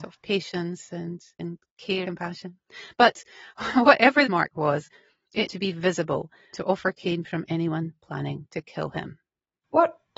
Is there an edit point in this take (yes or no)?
yes